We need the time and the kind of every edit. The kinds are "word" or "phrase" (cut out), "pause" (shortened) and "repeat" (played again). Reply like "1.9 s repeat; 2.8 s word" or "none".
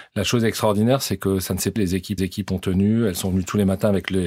1.8 s word; 2.2 s repeat